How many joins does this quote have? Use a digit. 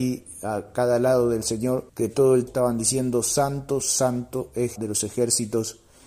4